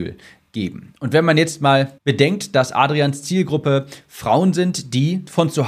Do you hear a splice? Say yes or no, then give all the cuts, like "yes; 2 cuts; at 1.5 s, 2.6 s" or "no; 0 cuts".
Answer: yes; 1 cut; at 2.0 s